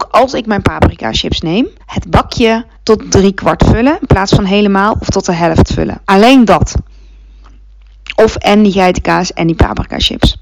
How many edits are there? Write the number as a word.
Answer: three